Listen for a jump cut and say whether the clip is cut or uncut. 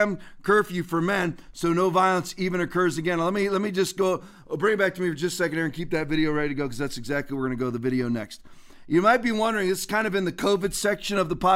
uncut